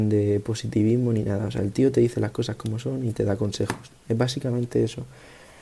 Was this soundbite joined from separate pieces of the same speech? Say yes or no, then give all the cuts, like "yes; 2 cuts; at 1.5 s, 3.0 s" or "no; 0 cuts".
no; 0 cuts